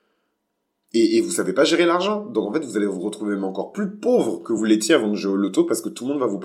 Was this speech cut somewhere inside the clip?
no; 0 cuts

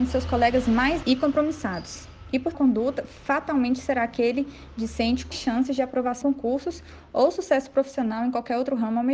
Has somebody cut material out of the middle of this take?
yes; 4 cuts; at 1.0 s, 2.5 s, 5.3 s, 6.2 s

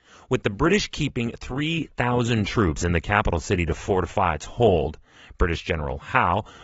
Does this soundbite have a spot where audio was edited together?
no; 0 cuts

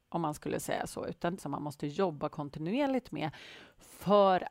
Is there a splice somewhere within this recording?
yes; 1 cut; at 1.4 s

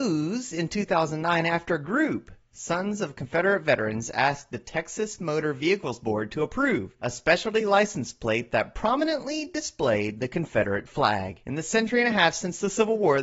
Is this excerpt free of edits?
yes; 0 cuts

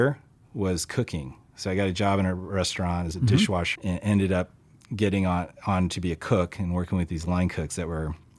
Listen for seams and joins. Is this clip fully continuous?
no; 1 cut; at 3.8 s

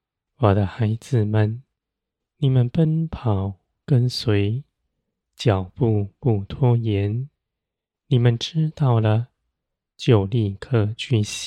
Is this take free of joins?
yes; 0 cuts

